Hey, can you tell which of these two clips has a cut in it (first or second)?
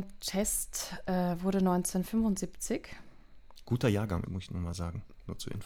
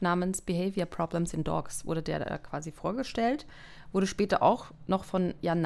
first